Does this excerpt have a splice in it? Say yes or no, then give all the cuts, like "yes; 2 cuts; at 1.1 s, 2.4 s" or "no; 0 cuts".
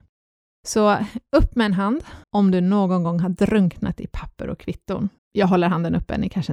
yes; 2 cuts; at 2.2 s, 5.2 s